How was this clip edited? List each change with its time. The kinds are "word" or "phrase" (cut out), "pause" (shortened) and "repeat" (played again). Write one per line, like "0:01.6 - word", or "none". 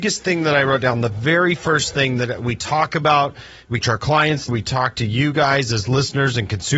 0:03.8 - word
0:04.5 - word